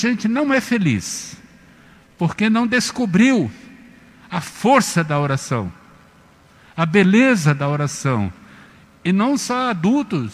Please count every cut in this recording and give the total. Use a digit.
0